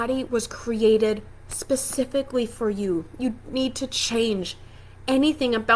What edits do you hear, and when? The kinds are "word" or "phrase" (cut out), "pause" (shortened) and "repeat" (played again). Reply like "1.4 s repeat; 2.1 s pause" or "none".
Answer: 3.4 s word